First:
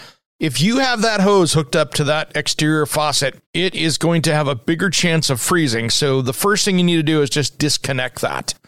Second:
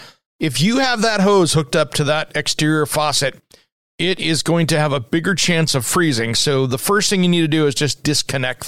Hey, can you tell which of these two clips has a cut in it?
first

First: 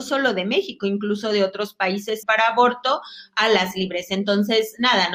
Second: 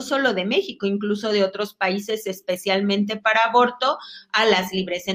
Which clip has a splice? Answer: first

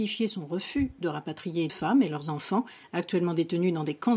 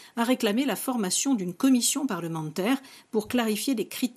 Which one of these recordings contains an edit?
first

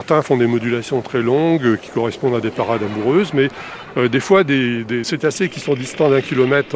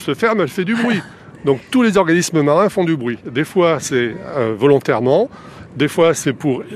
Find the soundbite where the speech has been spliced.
first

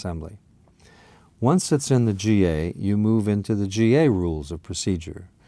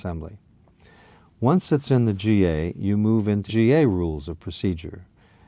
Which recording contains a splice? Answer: second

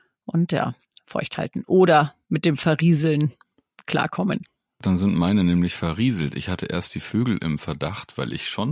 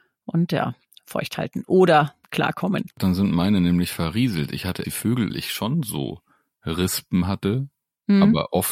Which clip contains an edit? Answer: second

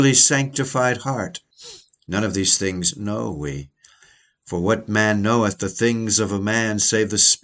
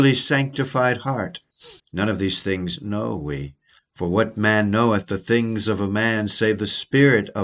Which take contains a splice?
second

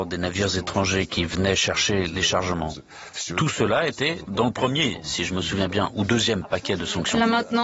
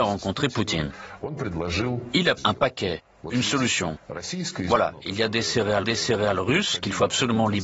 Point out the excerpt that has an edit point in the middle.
second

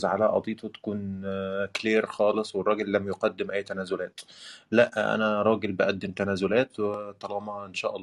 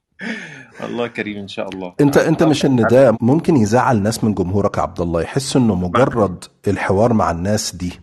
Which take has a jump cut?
second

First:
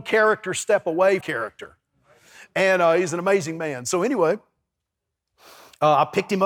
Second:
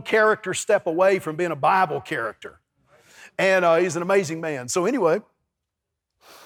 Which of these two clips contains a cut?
first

